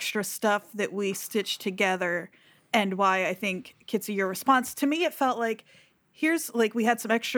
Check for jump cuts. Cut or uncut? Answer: uncut